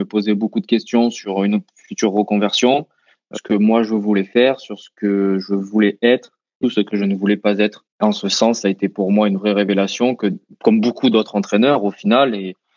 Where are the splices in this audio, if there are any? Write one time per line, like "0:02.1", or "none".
0:03.3
0:06.6